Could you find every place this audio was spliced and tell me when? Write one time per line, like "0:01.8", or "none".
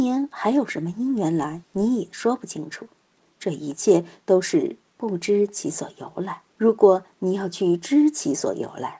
0:01.6
0:06.5